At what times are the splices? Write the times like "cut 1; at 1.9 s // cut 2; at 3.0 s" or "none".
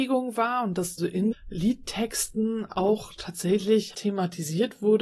cut 1; at 1.0 s // cut 2; at 1.3 s // cut 3; at 3.9 s

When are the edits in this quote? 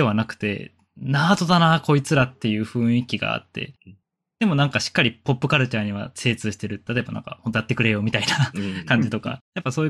cut 1; at 7.5 s

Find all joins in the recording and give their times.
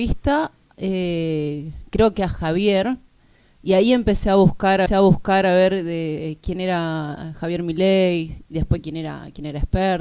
cut 1; at 4.9 s

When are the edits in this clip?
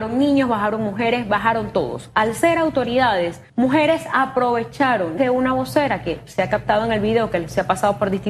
cut 1; at 3.5 s // cut 2; at 5.2 s

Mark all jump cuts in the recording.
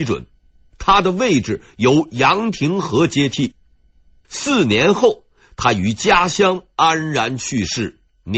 none

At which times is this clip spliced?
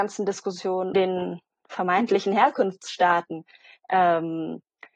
cut 1; at 0.9 s

